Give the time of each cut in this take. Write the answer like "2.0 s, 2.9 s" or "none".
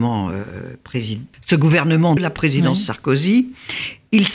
1.3 s, 2.2 s